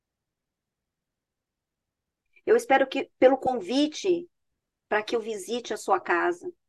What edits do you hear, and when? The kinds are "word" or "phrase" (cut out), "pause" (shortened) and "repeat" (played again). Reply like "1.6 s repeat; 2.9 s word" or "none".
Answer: none

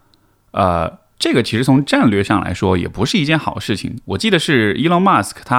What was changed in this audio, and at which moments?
none

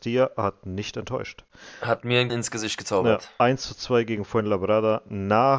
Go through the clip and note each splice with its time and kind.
2.3 s word

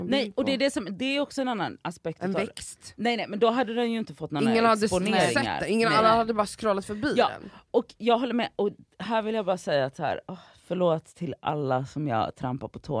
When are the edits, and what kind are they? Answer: none

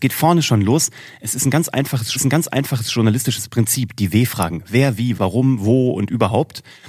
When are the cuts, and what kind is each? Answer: 2.2 s repeat; 5.2 s word

